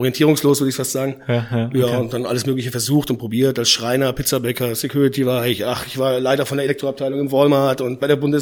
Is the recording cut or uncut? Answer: uncut